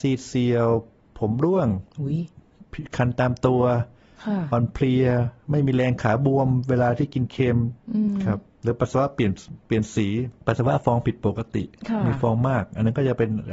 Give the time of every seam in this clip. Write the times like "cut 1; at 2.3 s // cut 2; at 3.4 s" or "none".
cut 1; at 1.9 s // cut 2; at 10.4 s

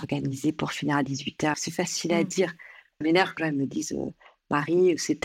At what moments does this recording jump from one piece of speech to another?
cut 1; at 1.5 s // cut 2; at 3.0 s // cut 3; at 3.4 s

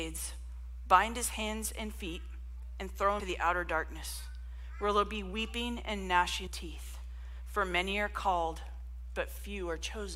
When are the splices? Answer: cut 1; at 3.2 s // cut 2; at 6.5 s

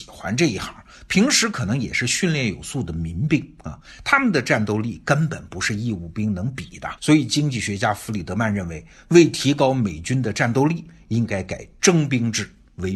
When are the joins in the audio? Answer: cut 1; at 7.0 s

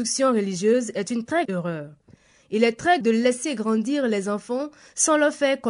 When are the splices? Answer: cut 1; at 1.4 s // cut 2; at 3.0 s

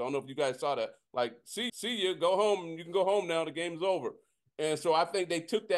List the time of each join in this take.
cut 1; at 1.7 s

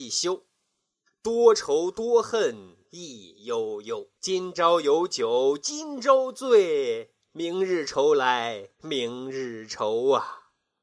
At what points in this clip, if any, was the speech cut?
cut 1; at 2.8 s // cut 2; at 4.1 s // cut 3; at 8.7 s

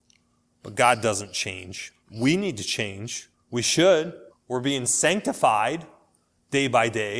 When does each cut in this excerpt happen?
cut 1; at 2.0 s // cut 2; at 3.3 s // cut 3; at 4.3 s

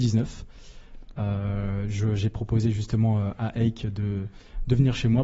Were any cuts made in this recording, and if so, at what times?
none

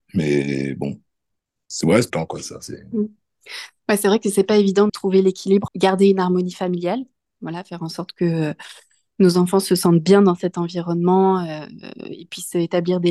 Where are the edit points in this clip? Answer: cut 1; at 2.1 s // cut 2; at 4.9 s // cut 3; at 5.7 s

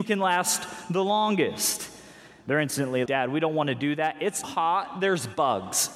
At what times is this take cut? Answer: cut 1; at 3.1 s // cut 2; at 4.4 s

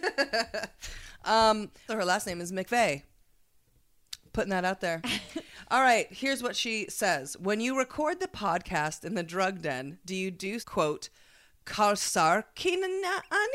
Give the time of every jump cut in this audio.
cut 1; at 1.9 s // cut 2; at 10.6 s

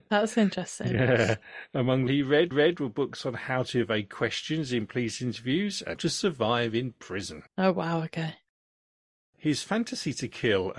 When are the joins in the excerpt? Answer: cut 1; at 2.1 s // cut 2; at 2.5 s // cut 3; at 5.9 s // cut 4; at 7.5 s

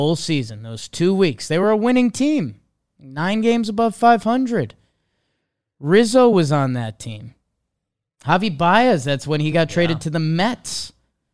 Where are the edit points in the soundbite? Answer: none

